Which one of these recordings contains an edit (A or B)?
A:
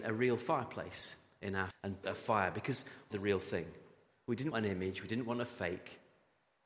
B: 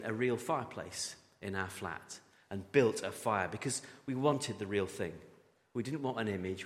A